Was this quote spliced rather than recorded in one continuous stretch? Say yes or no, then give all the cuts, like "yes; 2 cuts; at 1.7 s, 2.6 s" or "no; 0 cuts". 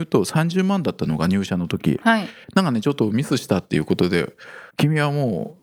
yes; 1 cut; at 4.7 s